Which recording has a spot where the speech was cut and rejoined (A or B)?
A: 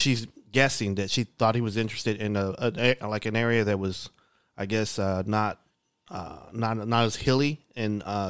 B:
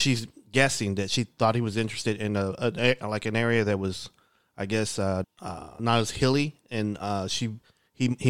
B